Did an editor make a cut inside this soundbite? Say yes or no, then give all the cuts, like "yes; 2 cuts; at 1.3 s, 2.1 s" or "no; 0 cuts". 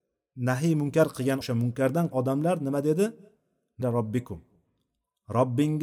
yes; 3 cuts; at 1.4 s, 2.1 s, 3.8 s